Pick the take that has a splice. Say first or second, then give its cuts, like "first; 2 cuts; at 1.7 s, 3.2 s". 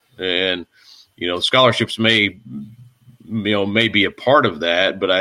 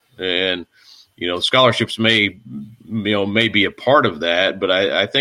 second; 1 cut; at 2.8 s